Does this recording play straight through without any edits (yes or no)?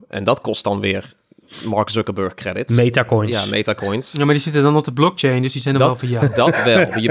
yes